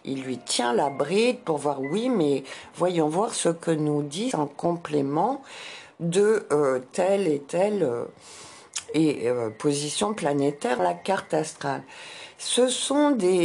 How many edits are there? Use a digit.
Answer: 2